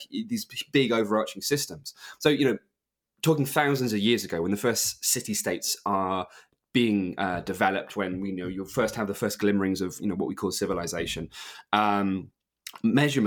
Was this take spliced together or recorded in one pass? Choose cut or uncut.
uncut